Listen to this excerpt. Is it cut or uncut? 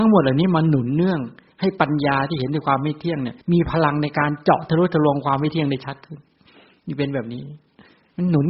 cut